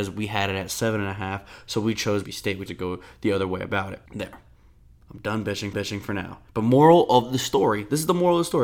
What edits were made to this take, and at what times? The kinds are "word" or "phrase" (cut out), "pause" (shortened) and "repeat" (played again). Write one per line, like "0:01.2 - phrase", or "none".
0:02.2 - word
0:02.7 - word
0:04.1 - pause
0:05.7 - repeat
0:06.5 - pause